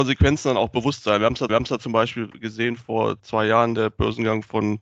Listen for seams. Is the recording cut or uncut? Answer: cut